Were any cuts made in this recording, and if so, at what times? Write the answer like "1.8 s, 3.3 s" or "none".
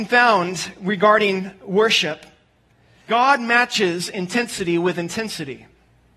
3.1 s